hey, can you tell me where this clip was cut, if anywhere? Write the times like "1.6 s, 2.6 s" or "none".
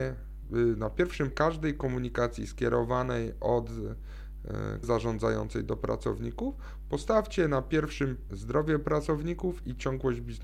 1.3 s, 4.8 s, 8.3 s